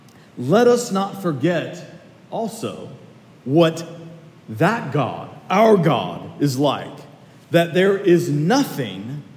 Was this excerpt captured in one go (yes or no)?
yes